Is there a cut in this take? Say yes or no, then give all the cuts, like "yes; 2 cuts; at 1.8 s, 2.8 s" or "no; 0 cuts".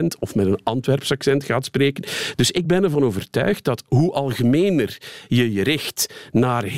no; 0 cuts